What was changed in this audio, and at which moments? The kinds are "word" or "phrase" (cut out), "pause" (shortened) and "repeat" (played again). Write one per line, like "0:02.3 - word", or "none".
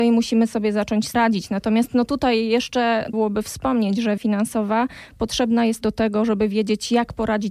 0:01.1 - word
0:03.1 - word
0:04.2 - word
0:05.8 - word

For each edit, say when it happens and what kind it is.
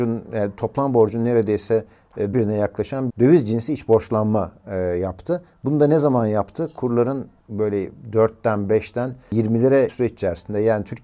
0:02.3 - word
0:03.1 - word
0:09.9 - word

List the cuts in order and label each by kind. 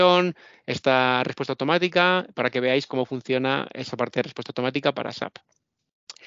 0:04.9 - word

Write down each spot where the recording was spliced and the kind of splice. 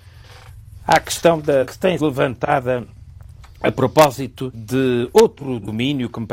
0:01.6 - word
0:02.0 - word
0:04.5 - word

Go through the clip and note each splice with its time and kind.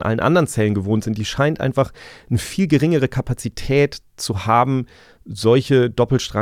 none

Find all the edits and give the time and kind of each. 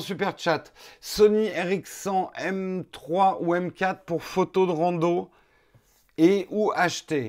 none

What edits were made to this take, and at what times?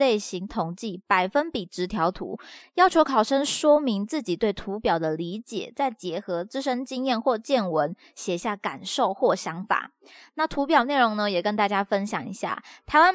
none

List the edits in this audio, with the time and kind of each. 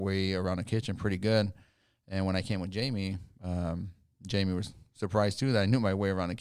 none

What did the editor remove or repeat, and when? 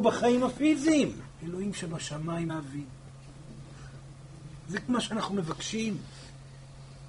0:01.3 - pause
0:02.5 - phrase
0:04.9 - word

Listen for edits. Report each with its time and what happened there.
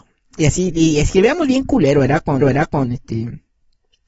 0:02.4 - repeat

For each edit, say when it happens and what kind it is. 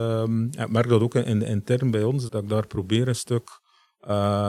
0:02.3 - word

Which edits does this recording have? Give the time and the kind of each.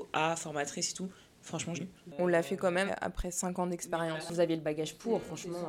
0:01.7 - phrase
0:02.9 - word

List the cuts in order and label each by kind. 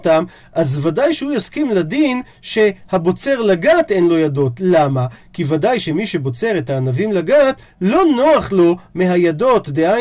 none

